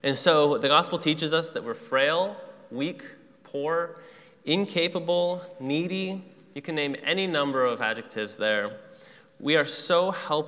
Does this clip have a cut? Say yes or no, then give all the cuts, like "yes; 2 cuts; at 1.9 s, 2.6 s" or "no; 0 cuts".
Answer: no; 0 cuts